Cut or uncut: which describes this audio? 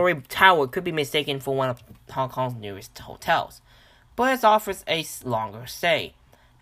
uncut